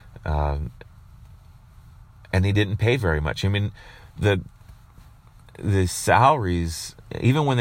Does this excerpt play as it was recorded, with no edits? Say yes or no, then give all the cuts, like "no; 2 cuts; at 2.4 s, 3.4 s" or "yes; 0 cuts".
yes; 0 cuts